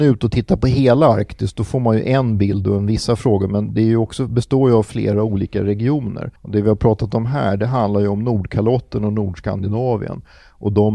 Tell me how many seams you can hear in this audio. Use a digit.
1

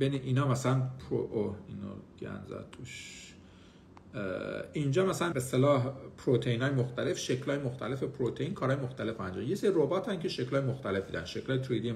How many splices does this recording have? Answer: 1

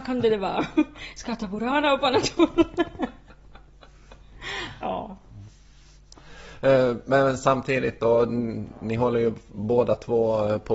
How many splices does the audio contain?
0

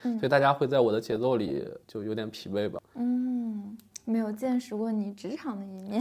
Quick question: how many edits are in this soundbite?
1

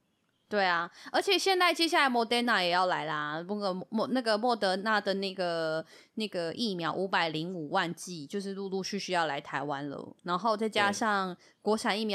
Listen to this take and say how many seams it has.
0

